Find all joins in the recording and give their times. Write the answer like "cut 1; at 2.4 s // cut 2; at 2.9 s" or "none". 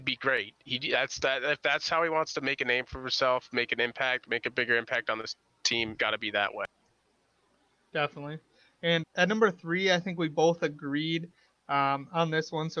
cut 1; at 6.0 s // cut 2; at 9.0 s